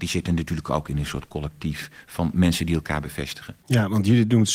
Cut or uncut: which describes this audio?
cut